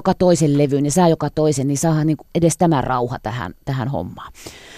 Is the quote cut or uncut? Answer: cut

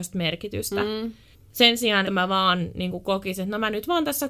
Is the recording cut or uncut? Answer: cut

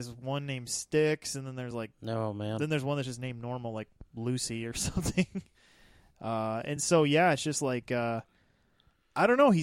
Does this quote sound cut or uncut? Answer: uncut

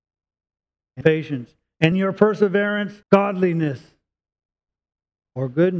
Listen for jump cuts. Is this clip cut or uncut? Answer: cut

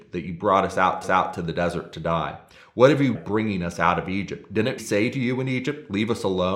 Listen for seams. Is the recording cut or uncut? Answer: cut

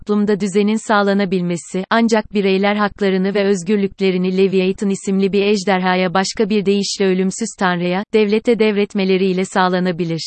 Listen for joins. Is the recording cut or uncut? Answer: uncut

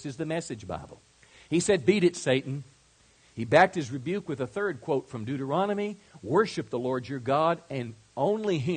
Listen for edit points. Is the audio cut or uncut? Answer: uncut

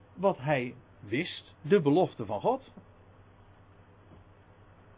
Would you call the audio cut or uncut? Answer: uncut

